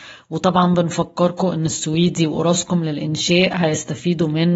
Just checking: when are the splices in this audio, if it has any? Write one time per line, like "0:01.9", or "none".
none